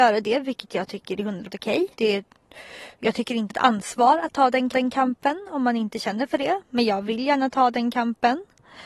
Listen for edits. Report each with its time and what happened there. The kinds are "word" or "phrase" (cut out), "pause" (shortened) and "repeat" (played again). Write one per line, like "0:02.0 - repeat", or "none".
0:01.5 - word
0:01.9 - pause
0:03.5 - phrase
0:04.7 - repeat